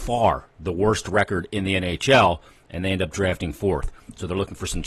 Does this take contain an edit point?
no; 0 cuts

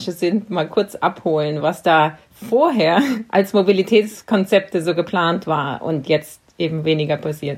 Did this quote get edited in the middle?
no; 0 cuts

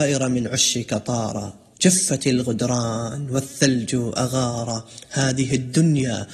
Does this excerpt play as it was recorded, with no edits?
no; 1 cut; at 1.7 s

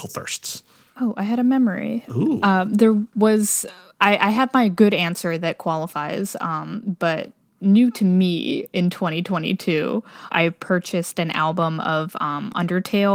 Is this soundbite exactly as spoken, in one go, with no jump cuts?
yes; 0 cuts

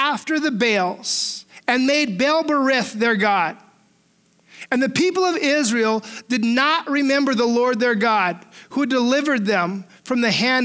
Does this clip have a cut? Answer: no; 0 cuts

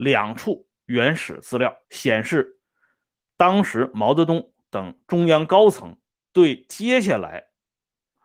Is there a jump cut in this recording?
yes; 2 cuts; at 1.8 s, 6.1 s

